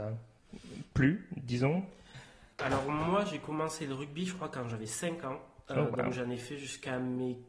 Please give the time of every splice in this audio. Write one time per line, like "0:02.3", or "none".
0:02.5